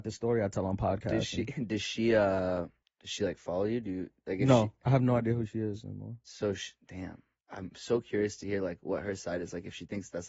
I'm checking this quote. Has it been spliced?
yes; 1 cut; at 2.8 s

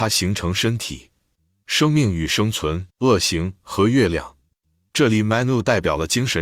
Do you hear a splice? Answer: yes; 1 cut; at 2.9 s

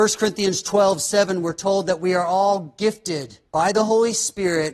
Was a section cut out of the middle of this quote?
yes; 1 cut; at 3.5 s

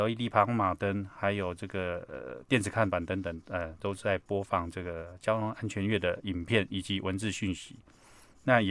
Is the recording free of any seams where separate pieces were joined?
yes; 0 cuts

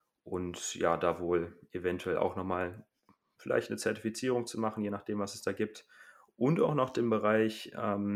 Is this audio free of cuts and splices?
yes; 0 cuts

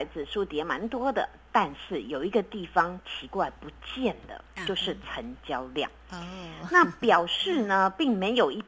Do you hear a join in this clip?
no; 0 cuts

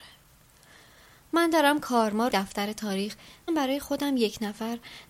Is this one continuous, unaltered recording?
no; 2 cuts; at 2.3 s, 3.5 s

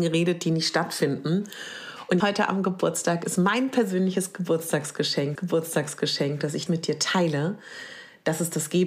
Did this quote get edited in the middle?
yes; 4 cuts; at 2.2 s, 3.4 s, 5.4 s, 6.7 s

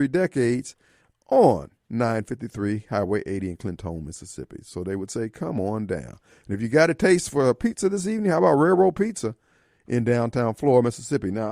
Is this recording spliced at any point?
no; 0 cuts

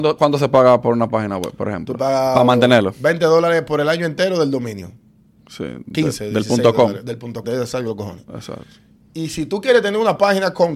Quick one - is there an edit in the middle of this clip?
yes; 1 cut; at 7.4 s

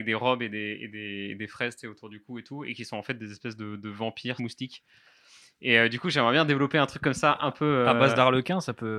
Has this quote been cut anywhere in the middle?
yes; 1 cut; at 4.4 s

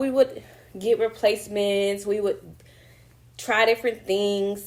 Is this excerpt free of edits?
yes; 0 cuts

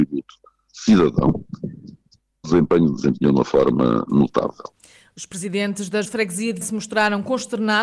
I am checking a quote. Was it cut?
yes; 4 cuts; at 2.4 s, 2.9 s, 6.0 s, 6.6 s

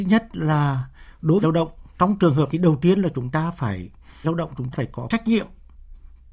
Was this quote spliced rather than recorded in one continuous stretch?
yes; 5 cuts; at 1.4 s, 2.5 s, 4.2 s, 4.7 s, 5.1 s

